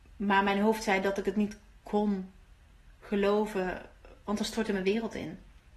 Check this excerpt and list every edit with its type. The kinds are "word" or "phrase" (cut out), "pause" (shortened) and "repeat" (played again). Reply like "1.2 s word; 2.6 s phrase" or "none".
none